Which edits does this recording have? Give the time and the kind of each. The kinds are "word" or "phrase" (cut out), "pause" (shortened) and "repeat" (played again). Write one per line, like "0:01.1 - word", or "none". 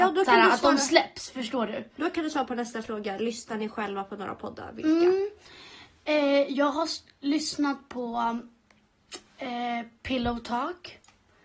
none